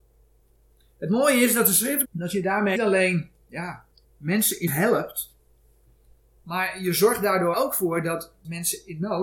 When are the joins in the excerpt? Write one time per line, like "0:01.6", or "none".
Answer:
0:02.0
0:02.7
0:04.0
0:04.7
0:07.5